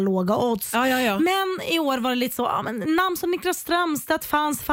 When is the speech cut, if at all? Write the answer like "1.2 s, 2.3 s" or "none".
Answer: none